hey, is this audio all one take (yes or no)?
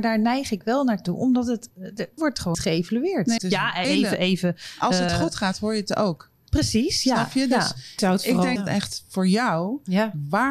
no